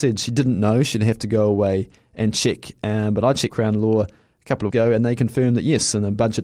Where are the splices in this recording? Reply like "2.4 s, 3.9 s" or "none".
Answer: 3.5 s, 4.7 s